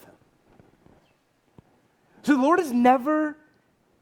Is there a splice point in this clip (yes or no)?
no